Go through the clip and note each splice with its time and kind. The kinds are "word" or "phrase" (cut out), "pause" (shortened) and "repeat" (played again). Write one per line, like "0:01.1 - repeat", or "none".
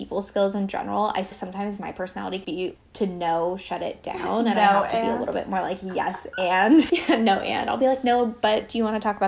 0:01.3 - word
0:02.4 - word
0:06.9 - word